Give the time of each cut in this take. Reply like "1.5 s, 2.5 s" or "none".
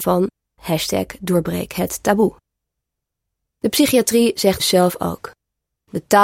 4.6 s